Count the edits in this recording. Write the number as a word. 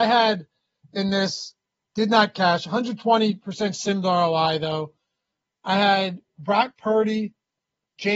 zero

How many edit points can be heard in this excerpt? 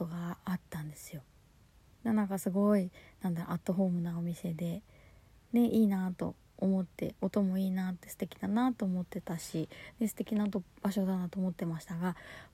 zero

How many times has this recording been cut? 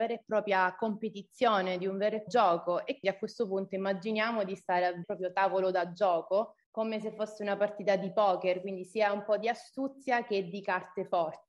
four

